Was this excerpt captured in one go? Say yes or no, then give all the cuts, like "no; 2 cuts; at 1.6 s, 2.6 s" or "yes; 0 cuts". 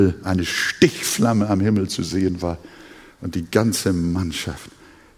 yes; 0 cuts